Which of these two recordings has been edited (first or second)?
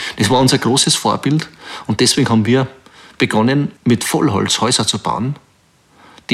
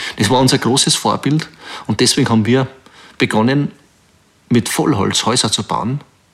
first